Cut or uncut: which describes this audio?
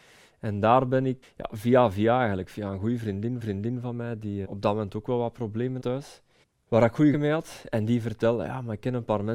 cut